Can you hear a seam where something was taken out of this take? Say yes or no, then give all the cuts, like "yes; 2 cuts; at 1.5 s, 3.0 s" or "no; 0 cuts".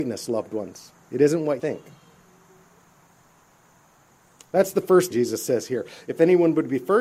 yes; 3 cuts; at 1.0 s, 1.6 s, 5.1 s